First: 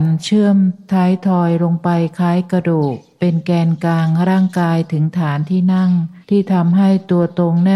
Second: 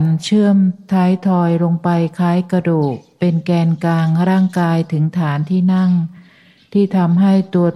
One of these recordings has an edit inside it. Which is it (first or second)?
first